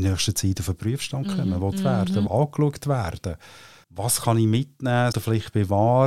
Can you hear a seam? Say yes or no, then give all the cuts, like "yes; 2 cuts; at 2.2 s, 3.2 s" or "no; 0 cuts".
yes; 4 cuts; at 1.7 s, 2.3 s, 3.8 s, 5.1 s